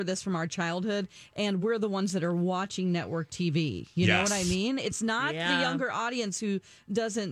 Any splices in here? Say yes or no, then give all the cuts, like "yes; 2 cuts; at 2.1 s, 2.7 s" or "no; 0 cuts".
no; 0 cuts